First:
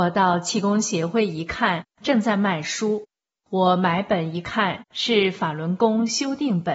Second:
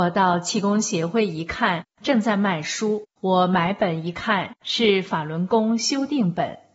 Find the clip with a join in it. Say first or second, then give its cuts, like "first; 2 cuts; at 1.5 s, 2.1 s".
second; 1 cut; at 3.1 s